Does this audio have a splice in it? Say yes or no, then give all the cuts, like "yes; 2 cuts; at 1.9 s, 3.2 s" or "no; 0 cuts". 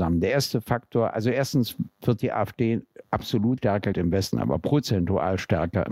yes; 3 cuts; at 3.6 s, 3.9 s, 4.3 s